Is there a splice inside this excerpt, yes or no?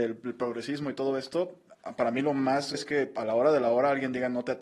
yes